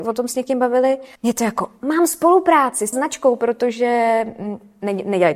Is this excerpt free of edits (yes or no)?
no